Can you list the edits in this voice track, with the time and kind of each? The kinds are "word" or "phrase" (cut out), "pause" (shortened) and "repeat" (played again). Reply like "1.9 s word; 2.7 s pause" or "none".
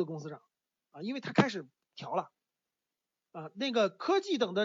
none